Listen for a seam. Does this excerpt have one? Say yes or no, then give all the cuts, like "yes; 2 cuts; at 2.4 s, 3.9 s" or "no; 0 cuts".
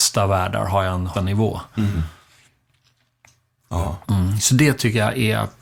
yes; 2 cuts; at 1.1 s, 4.0 s